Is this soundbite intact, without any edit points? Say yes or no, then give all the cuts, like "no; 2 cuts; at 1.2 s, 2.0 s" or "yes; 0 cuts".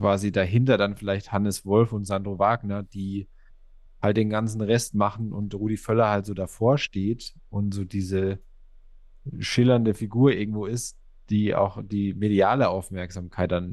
yes; 0 cuts